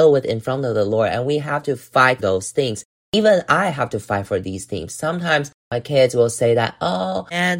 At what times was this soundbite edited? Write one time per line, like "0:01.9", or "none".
0:02.2
0:05.6